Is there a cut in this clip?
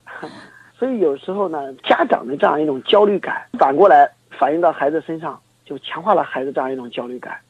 yes; 1 cut; at 3.5 s

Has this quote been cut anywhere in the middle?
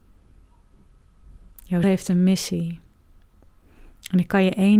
yes; 1 cut; at 1.8 s

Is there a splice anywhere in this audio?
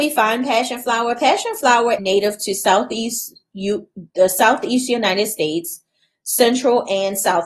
yes; 1 cut; at 2.0 s

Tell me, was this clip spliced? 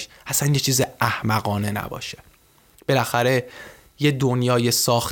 no; 0 cuts

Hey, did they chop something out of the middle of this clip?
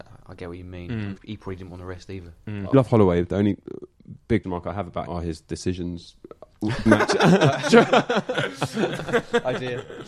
yes; 5 cuts; at 1.2 s, 2.7 s, 4.4 s, 5.1 s, 6.9 s

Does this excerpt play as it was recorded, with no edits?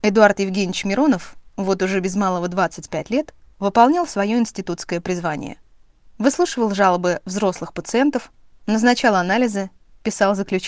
yes; 0 cuts

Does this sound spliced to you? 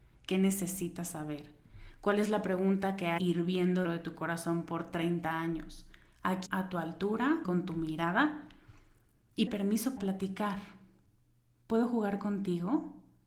yes; 6 cuts; at 3.2 s, 3.8 s, 6.5 s, 7.4 s, 9.5 s, 10.0 s

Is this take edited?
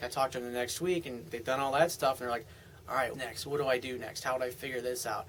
yes; 2 cuts; at 1.3 s, 3.1 s

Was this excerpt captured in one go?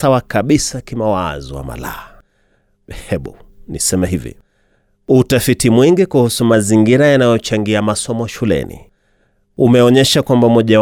yes; 0 cuts

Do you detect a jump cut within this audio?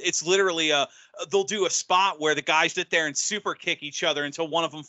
yes; 1 cut; at 2.7 s

